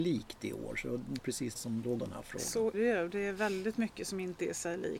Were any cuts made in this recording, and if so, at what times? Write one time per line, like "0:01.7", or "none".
0:01.2
0:01.6
0:02.0
0:02.7